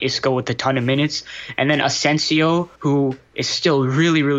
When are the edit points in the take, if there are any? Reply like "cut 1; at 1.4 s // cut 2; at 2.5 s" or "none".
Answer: cut 1; at 2.8 s